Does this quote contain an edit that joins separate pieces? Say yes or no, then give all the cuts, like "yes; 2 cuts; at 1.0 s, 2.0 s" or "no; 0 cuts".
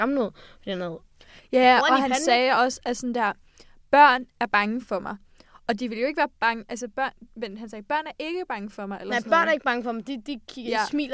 no; 0 cuts